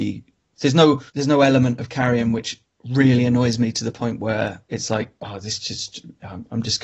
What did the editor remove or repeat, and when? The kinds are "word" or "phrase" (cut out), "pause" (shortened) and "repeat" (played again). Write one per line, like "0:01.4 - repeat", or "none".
0:01.1 - pause
0:04.6 - pause